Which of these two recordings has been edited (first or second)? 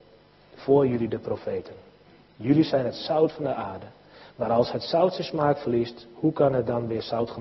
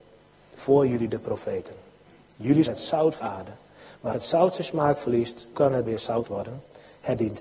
second